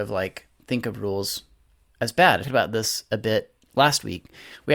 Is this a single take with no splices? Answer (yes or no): no